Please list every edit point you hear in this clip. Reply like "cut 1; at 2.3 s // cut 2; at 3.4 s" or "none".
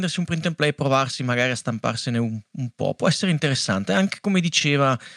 none